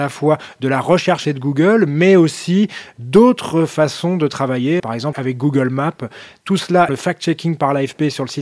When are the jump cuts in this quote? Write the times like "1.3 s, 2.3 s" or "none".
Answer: 1.2 s, 4.8 s, 5.1 s, 6.9 s